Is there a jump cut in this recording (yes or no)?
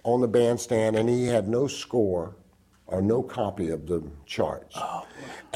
no